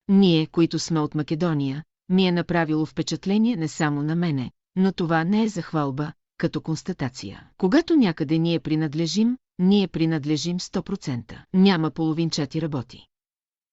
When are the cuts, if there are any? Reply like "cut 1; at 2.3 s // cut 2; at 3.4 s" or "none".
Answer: cut 1; at 7.5 s // cut 2; at 11.4 s